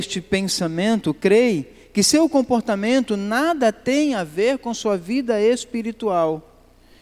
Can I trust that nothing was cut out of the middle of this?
yes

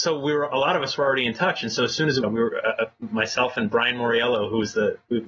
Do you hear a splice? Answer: yes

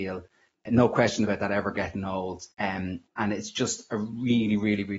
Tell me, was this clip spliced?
yes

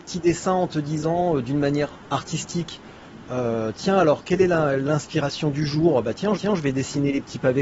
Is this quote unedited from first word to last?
no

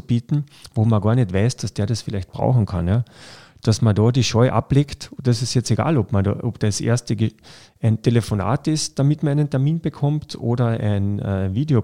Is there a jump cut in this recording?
no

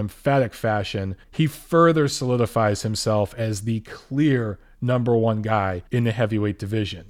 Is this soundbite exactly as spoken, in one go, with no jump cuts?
no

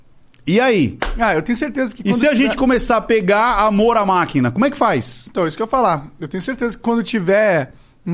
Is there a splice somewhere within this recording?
no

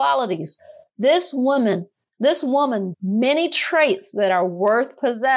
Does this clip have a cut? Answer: yes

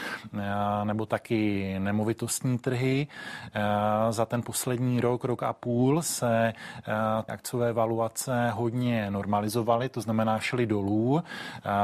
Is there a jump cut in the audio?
yes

